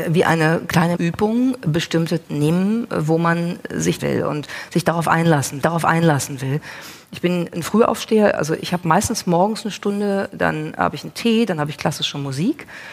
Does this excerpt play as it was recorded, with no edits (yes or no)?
no